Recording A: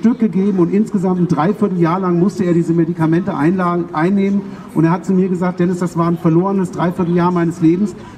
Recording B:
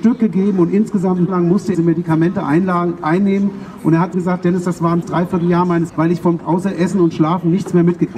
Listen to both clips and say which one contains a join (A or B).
B